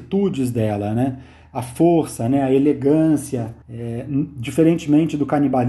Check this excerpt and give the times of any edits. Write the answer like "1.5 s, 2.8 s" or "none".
3.6 s